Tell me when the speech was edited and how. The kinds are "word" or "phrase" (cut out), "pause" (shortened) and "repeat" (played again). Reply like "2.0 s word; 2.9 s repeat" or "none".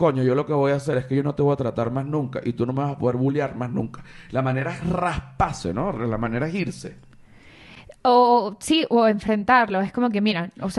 none